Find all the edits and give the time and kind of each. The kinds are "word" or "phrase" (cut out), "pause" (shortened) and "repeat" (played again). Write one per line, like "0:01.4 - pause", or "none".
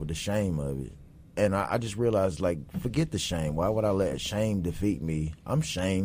none